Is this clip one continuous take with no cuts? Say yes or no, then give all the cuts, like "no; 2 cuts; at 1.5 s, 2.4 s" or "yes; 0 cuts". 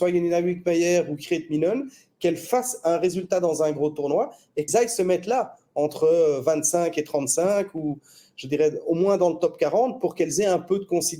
no; 1 cut; at 4.7 s